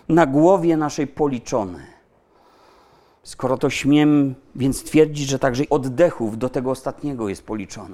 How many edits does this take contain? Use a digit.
2